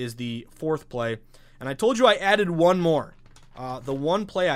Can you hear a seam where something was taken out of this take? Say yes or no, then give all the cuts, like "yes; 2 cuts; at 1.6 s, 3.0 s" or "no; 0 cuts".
no; 0 cuts